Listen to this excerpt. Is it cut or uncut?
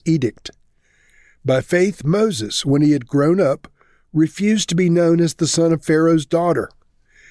uncut